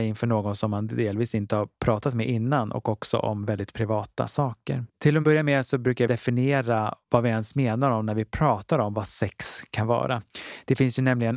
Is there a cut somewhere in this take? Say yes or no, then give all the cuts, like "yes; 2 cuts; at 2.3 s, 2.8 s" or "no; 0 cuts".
yes; 2 cuts; at 4.9 s, 6.1 s